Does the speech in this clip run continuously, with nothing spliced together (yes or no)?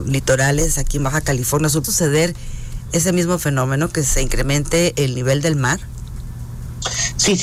no